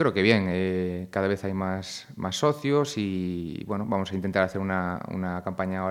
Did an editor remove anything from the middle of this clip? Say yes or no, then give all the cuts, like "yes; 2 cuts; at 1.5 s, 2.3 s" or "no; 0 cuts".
no; 0 cuts